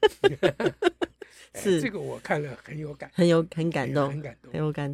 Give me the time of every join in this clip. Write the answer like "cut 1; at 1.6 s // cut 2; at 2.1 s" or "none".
none